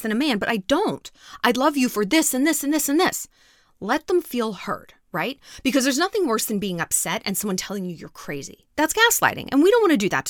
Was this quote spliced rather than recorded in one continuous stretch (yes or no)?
no